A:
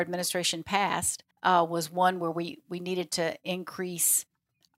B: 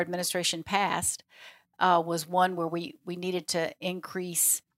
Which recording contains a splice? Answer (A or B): A